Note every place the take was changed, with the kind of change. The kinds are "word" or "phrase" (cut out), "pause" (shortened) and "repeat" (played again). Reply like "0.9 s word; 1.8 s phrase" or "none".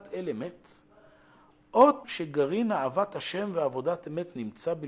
2.0 s word